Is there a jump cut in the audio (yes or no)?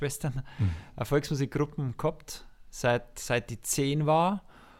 no